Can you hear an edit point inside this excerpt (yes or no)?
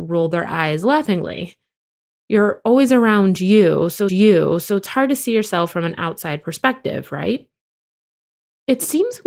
yes